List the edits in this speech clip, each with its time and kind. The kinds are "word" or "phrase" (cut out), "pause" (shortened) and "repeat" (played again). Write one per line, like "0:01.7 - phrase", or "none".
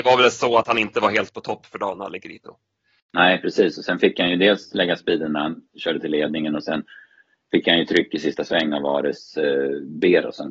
none

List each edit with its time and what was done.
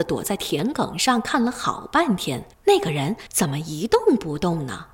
0:02.5 - pause
0:03.3 - pause

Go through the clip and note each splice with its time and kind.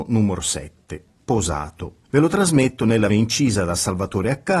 0:02.0 - pause
0:03.1 - word

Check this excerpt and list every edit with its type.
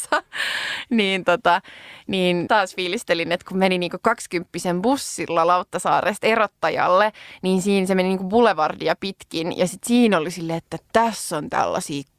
0:02.5 - phrase

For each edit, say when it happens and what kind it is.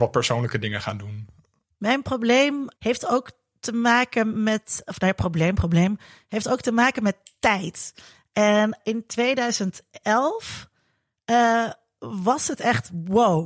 0:02.8 - word
0:08.8 - word

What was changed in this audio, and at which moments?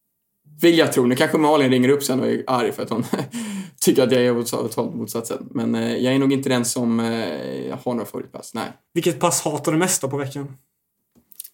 none

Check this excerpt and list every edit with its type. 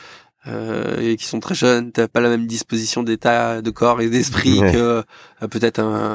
none

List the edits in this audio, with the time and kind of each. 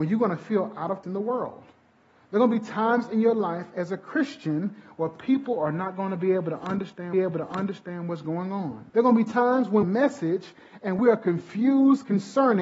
0:01.0 - word
0:07.1 - repeat
0:08.9 - pause
0:09.8 - phrase

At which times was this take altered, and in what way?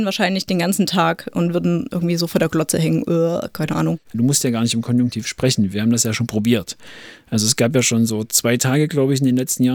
none

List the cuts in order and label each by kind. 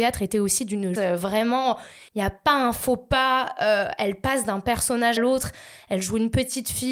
0:01.0 - word
0:02.1 - pause
0:05.2 - word

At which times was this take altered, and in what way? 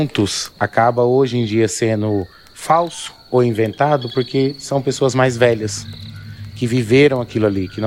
none

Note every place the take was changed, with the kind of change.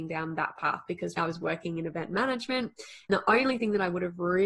0:01.2 - word
0:03.1 - word

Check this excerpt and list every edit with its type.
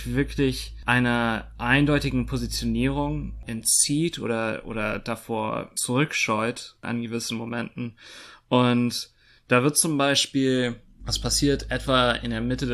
none

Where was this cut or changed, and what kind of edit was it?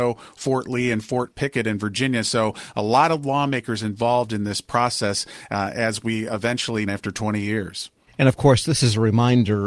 0:06.9 - phrase

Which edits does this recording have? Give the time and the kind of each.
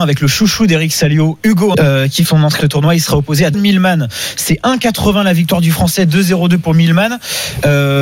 0:01.7 - word
0:02.2 - phrase
0:02.6 - phrase
0:03.5 - word

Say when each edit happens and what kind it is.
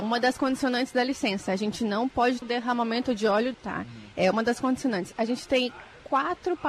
0:02.4 - word
0:03.5 - phrase

